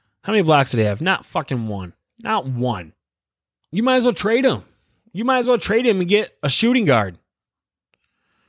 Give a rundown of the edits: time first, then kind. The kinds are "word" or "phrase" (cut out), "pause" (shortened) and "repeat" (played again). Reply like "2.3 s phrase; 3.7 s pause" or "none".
none